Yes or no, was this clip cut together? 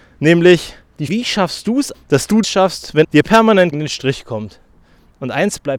yes